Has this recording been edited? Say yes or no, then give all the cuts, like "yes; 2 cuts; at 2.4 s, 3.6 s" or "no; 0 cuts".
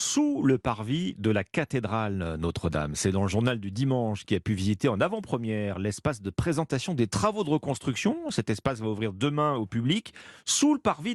no; 0 cuts